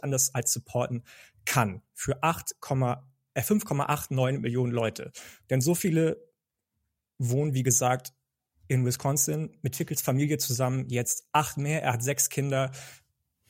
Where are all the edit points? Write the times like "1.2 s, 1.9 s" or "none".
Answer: none